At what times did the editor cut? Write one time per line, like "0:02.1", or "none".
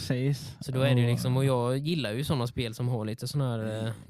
none